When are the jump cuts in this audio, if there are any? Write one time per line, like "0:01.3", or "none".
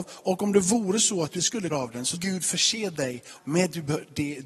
0:01.4
0:01.7
0:02.1
0:03.4

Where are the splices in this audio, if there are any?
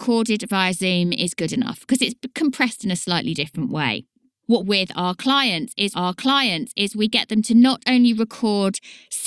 0:04.6
0:05.9

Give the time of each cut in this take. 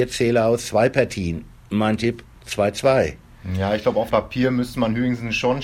0:04.1

